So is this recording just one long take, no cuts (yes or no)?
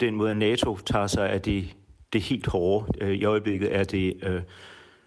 yes